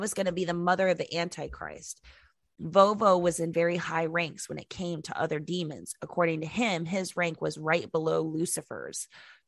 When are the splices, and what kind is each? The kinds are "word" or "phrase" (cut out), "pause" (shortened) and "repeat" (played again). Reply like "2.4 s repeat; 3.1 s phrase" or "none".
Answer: none